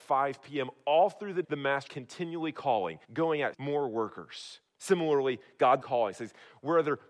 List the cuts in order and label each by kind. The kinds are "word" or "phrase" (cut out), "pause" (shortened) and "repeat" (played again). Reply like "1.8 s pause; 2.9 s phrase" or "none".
1.4 s word; 1.9 s word; 3.0 s pause; 3.5 s word; 4.7 s pause; 5.8 s phrase